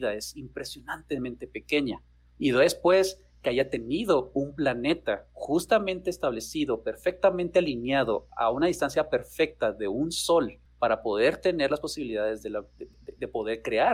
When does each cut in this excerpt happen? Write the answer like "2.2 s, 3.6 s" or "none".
none